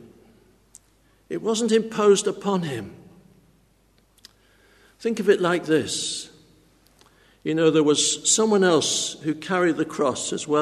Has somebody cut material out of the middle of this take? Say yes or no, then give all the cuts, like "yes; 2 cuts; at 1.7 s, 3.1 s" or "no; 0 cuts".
no; 0 cuts